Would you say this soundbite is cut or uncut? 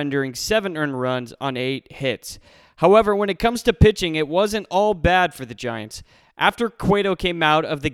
uncut